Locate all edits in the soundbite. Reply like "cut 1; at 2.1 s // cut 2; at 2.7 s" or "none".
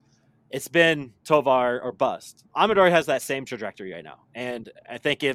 cut 1; at 2.5 s